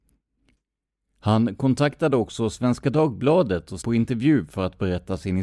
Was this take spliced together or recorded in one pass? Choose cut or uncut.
cut